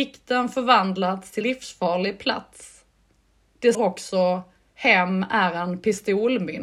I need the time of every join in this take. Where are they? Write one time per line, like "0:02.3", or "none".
0:01.4
0:03.7